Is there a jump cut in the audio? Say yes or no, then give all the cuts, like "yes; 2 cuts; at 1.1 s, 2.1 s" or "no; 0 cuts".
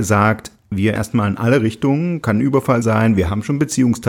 yes; 2 cuts; at 1.0 s, 2.8 s